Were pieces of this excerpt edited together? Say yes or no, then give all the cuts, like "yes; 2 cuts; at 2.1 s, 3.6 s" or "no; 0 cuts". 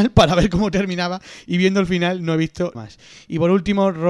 yes; 1 cut; at 2.7 s